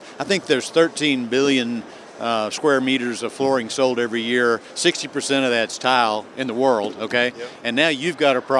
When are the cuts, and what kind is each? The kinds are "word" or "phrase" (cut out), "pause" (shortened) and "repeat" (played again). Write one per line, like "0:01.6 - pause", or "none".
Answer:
none